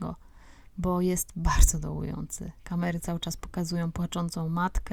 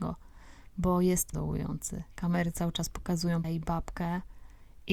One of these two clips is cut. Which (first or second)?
second